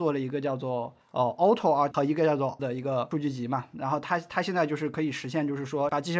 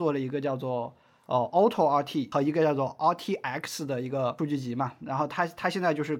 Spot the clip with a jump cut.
first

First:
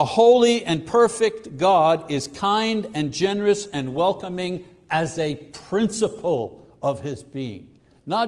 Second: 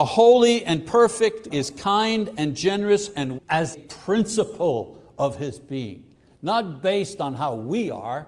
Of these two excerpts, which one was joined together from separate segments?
second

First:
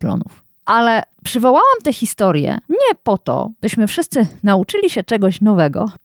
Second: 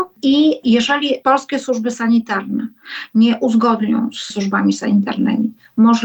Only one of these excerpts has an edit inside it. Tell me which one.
second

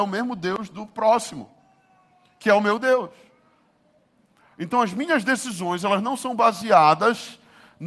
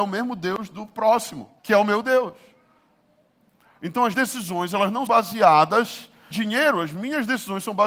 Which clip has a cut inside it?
second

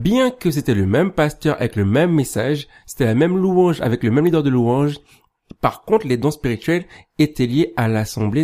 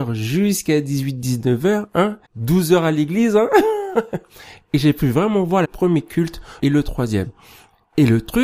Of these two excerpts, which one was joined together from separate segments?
second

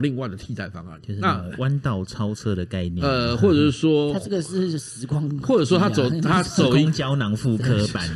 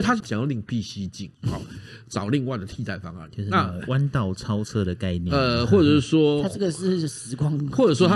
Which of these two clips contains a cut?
second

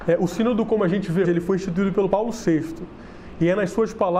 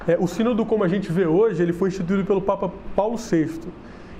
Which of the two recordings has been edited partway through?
first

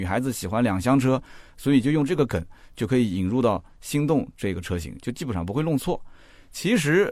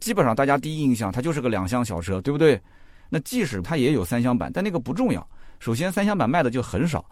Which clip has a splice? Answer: second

